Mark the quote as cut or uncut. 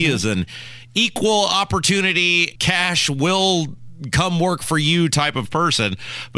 cut